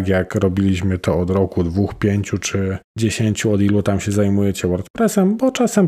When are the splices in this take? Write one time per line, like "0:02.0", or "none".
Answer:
0:02.9